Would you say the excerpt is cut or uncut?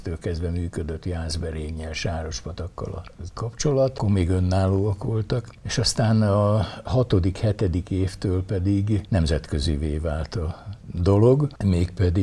uncut